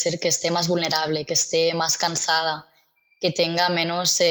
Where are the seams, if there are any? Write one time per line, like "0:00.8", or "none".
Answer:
none